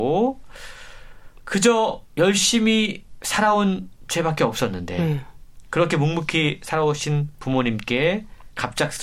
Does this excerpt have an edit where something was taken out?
no; 0 cuts

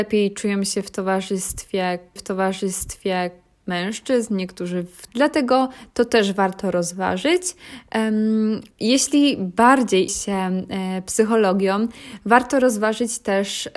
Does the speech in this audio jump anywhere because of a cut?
yes; 4 cuts; at 2.2 s, 5.1 s, 8.7 s, 10.1 s

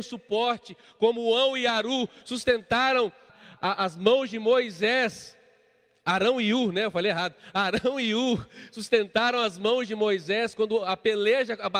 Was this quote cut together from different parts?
yes; 1 cut; at 3.3 s

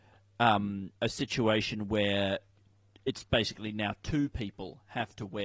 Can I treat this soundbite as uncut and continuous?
no; 1 cut; at 1.0 s

